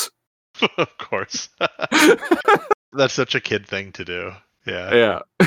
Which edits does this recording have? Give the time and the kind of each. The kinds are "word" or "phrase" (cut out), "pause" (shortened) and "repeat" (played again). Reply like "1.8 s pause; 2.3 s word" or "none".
2.9 s word